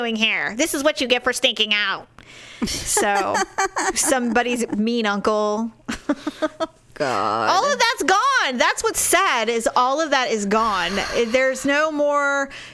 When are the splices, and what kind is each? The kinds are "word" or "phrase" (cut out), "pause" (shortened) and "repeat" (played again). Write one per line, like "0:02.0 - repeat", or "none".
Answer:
none

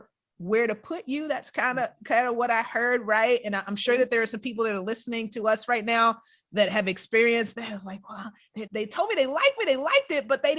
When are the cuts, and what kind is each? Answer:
0:08.7 - word
0:09.6 - repeat

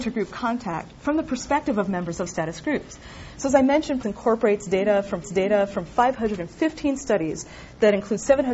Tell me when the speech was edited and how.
0:01.0 - pause
0:02.3 - word
0:04.0 - phrase
0:05.2 - repeat

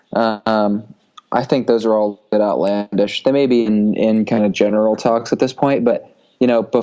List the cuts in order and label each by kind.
none

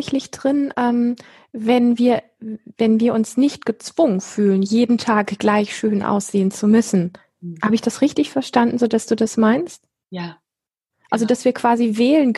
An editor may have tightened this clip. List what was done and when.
none

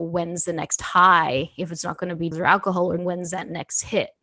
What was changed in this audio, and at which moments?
0:02.3 - word
0:03.0 - word

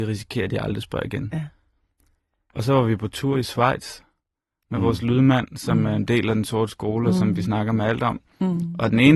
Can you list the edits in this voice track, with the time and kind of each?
none

